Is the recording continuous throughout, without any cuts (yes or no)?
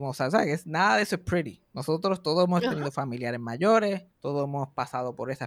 no